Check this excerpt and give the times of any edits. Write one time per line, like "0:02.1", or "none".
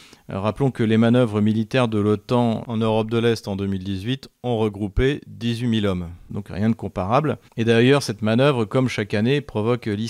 0:07.5